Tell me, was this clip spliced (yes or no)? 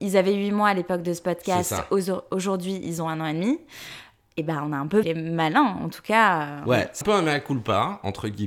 yes